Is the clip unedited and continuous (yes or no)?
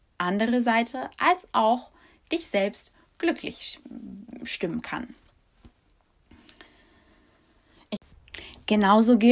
yes